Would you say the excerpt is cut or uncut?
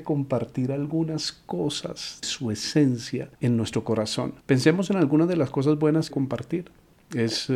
cut